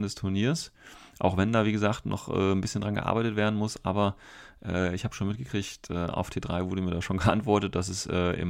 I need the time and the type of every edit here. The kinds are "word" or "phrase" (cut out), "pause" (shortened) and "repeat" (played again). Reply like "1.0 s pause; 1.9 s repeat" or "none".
none